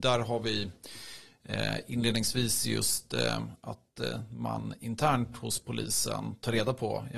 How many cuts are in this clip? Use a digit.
0